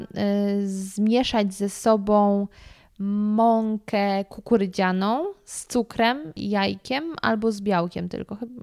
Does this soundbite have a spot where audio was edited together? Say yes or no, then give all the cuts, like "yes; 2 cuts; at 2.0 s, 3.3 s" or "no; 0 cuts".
no; 0 cuts